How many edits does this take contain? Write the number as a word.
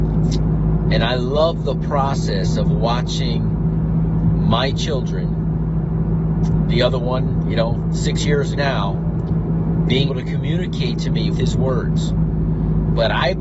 four